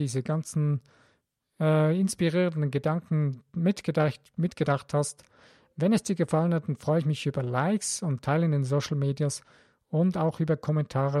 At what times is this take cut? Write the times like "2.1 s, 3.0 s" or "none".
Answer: none